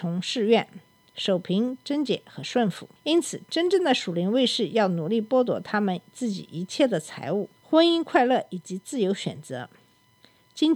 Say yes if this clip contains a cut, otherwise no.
yes